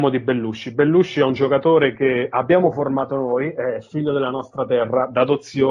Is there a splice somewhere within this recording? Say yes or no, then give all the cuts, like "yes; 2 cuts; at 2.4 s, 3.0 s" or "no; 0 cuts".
no; 0 cuts